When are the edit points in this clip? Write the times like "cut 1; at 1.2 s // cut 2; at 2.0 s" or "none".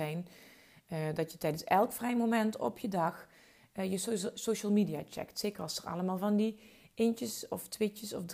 none